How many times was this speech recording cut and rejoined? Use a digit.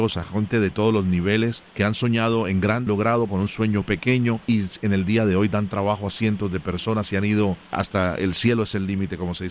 6